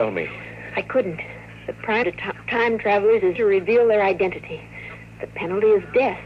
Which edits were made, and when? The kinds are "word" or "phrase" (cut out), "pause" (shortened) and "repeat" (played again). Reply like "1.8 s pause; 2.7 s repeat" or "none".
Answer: 2.0 s word; 3.4 s word